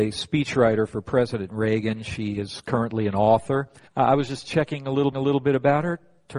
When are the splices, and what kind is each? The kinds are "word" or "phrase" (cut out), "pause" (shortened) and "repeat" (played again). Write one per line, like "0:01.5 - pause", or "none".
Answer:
0:03.9 - pause
0:05.1 - repeat